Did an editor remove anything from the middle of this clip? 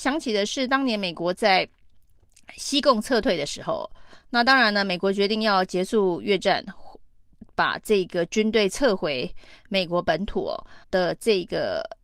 yes; 1 cut; at 10.8 s

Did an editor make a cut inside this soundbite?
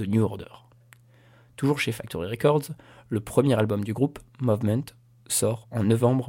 no; 0 cuts

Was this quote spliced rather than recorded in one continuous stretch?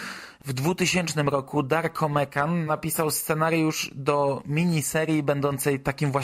no; 0 cuts

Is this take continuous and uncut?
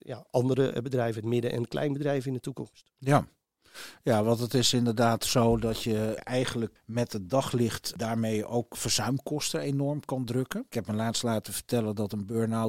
no; 1 cut; at 6.8 s

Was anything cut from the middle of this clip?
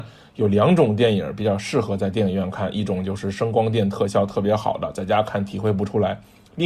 no; 0 cuts

